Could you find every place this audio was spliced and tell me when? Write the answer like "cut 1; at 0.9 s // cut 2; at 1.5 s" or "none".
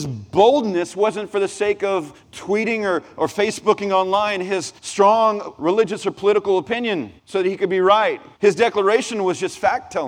cut 1; at 2.2 s // cut 2; at 4.8 s // cut 3; at 7.2 s // cut 4; at 8.3 s